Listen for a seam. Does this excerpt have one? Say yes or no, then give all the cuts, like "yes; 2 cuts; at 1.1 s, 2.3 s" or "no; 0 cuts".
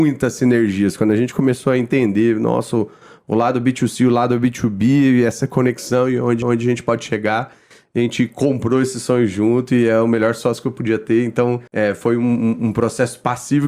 yes; 2 cuts; at 6.4 s, 11.7 s